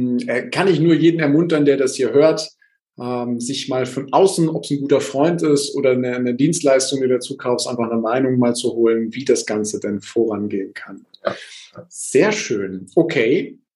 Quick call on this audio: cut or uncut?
uncut